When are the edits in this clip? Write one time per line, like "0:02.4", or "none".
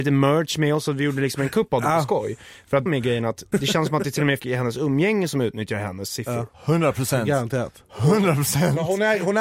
0:02.9
0:03.5
0:04.4
0:06.5